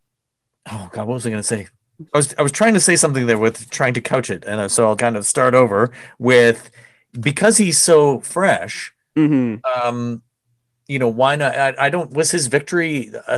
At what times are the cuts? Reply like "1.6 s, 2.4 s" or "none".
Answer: 2.1 s, 5.0 s, 12.1 s